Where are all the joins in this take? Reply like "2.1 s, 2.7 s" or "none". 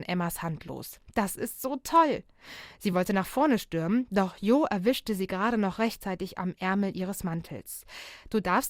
none